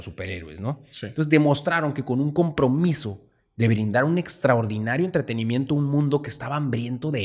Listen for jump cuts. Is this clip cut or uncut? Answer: uncut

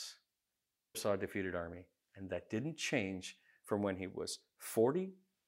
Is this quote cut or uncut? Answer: cut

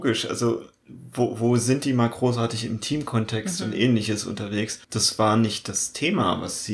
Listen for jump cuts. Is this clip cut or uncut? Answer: cut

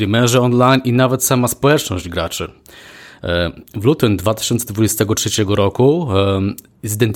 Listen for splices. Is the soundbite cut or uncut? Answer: uncut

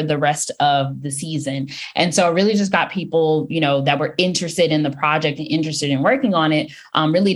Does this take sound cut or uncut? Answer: uncut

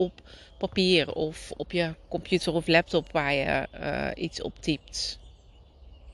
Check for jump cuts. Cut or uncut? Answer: uncut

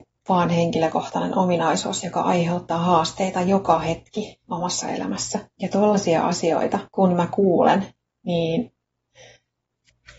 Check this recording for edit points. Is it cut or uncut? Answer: cut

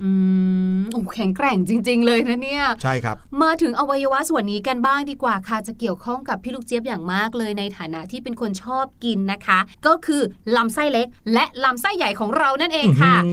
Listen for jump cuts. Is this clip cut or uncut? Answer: cut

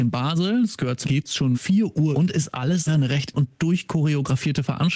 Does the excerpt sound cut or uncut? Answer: cut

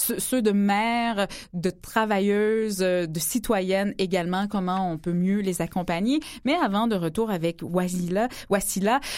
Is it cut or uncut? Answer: uncut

